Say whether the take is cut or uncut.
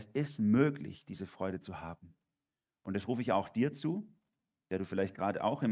uncut